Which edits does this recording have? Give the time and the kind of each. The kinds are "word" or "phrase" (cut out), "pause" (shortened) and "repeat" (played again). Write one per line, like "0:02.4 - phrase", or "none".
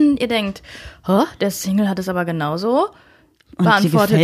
none